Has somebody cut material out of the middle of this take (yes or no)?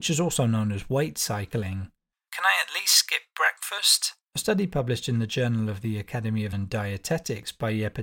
yes